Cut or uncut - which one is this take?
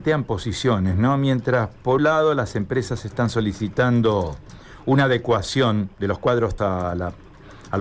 cut